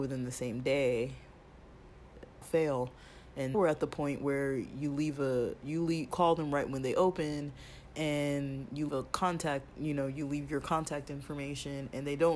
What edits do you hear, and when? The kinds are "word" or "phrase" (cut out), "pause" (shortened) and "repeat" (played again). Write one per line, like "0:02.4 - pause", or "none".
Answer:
0:02.4 - word
0:03.5 - word
0:06.1 - word
0:08.9 - word